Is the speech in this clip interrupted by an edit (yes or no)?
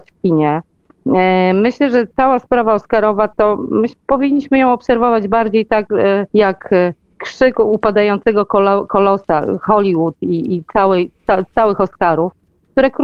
yes